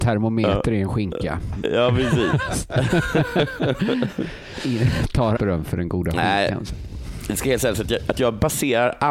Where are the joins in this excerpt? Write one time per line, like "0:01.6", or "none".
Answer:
0:05.4